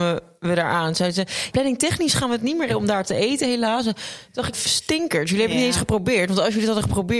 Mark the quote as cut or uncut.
cut